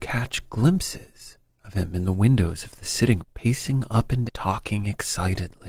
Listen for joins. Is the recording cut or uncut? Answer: cut